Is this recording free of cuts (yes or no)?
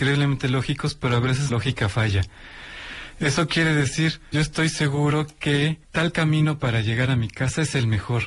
no